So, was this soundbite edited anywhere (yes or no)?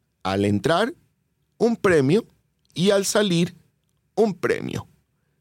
no